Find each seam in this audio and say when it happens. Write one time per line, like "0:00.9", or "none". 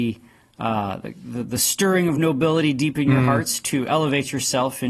none